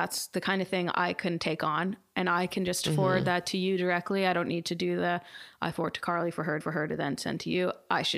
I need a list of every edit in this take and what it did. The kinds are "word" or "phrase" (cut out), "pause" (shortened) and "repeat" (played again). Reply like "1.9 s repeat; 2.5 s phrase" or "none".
6.6 s repeat